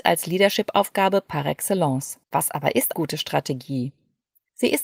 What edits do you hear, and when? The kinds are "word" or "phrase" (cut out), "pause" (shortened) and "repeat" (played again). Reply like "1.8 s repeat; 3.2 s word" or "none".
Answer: 2.2 s pause; 2.9 s word